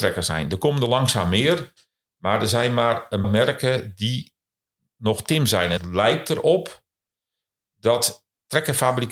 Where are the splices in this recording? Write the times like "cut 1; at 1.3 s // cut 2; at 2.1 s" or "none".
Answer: cut 1; at 3.2 s // cut 2; at 5.8 s